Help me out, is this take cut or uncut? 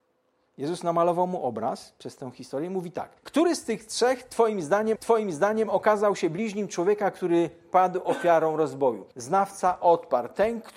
cut